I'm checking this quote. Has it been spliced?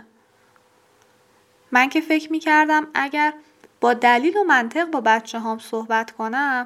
no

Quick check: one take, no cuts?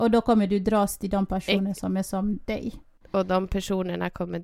yes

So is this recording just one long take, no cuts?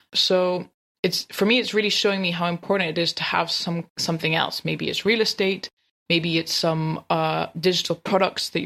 yes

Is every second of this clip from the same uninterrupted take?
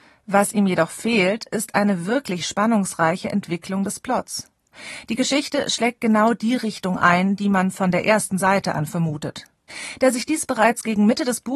yes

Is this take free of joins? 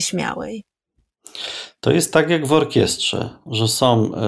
yes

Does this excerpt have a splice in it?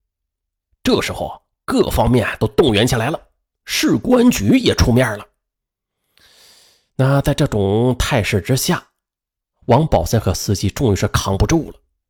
no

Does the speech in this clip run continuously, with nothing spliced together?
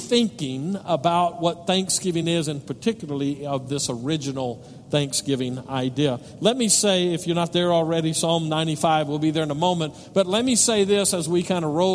yes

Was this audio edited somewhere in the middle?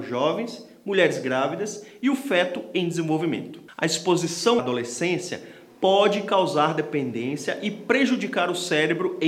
yes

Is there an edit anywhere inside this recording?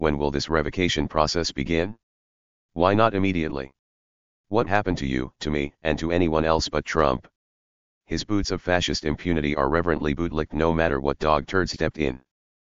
yes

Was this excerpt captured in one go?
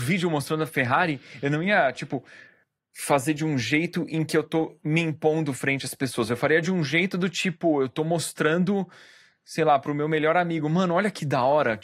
yes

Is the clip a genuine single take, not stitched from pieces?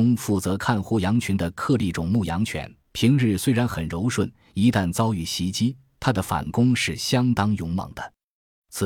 no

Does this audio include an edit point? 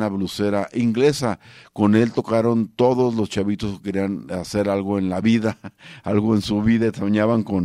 no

